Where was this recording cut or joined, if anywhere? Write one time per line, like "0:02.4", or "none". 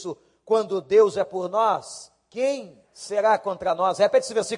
0:02.8